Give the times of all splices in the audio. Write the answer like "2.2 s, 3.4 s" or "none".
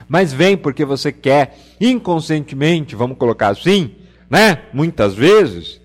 none

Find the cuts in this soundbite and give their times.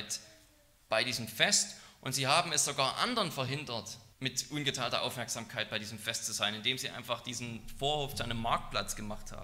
4.1 s

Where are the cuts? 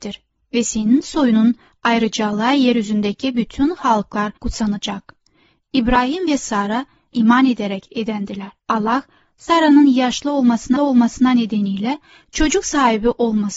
4.4 s, 7.1 s, 8.6 s, 10.8 s

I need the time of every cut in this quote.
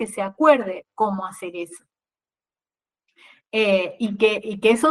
none

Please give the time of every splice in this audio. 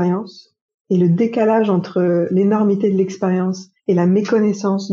3.8 s

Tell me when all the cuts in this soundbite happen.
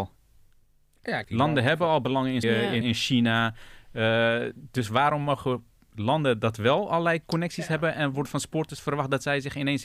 1.2 s, 2.4 s, 2.8 s

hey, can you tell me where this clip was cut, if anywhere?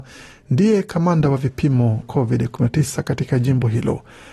2.0 s

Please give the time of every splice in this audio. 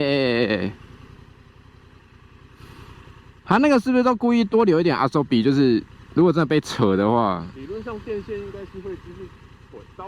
none

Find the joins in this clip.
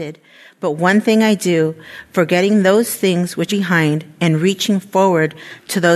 3.5 s

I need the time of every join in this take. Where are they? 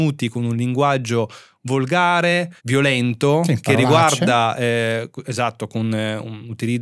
2.6 s

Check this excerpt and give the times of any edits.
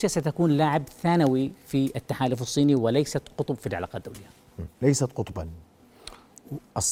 4.7 s

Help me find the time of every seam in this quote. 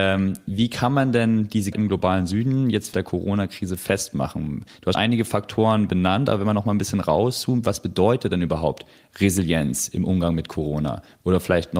1.7 s, 2.9 s, 4.9 s

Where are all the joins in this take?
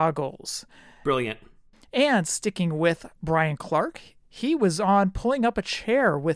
3.2 s

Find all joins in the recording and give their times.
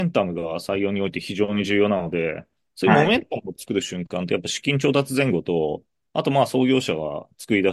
none

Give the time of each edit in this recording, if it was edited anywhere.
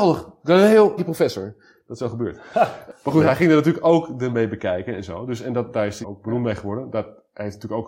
1.0 s, 2.0 s, 4.3 s, 6.0 s

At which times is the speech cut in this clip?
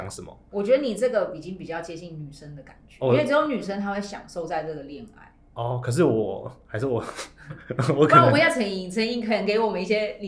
none

